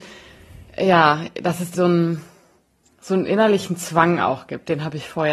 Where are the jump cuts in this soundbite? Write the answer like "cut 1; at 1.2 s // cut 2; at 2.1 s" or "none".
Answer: cut 1; at 1.7 s